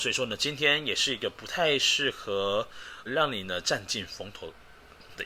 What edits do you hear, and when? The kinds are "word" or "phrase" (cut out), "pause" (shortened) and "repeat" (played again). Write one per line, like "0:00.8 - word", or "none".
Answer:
0:03.1 - word